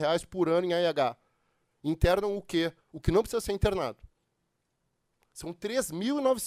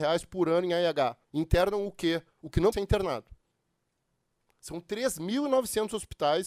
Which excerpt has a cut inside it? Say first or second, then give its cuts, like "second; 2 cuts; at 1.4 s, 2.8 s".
second; 2 cuts; at 1.2 s, 2.7 s